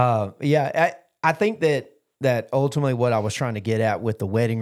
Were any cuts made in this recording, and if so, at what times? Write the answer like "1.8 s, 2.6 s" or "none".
none

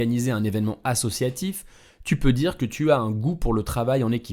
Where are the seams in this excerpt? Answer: none

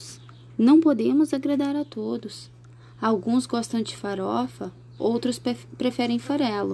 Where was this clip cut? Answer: none

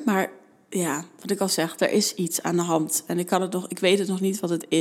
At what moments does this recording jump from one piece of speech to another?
none

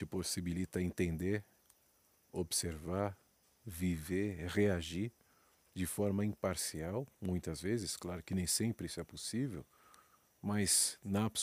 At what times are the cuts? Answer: 7.1 s

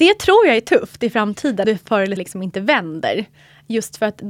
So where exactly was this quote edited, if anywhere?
1.6 s, 2.2 s

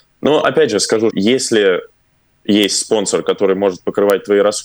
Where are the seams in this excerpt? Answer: 1.1 s

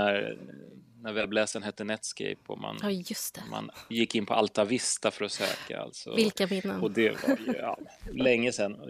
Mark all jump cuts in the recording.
none

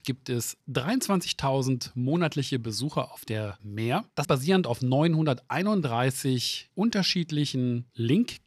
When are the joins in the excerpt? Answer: 3.6 s, 4.2 s

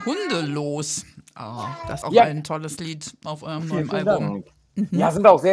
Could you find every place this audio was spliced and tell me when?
2.0 s

